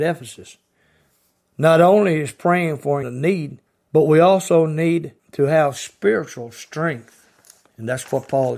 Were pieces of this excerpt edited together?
yes; 3 cuts; at 3.0 s, 3.7 s, 5.2 s

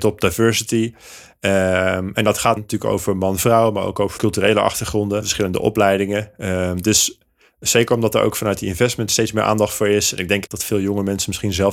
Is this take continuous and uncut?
no; 5 cuts; at 2.6 s, 4.2 s, 5.2 s, 9.1 s, 10.5 s

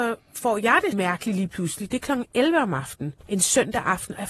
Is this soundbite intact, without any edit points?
no; 2 cuts; at 0.9 s, 3.2 s

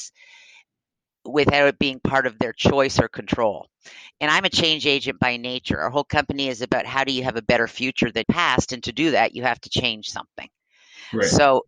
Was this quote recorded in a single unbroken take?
no; 1 cut; at 8.2 s

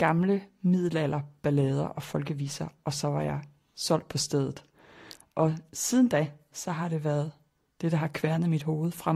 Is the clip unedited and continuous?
yes; 0 cuts

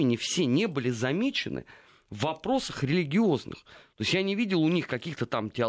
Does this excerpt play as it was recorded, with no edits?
yes; 0 cuts

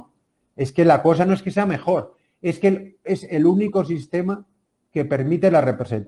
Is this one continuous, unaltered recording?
yes; 0 cuts

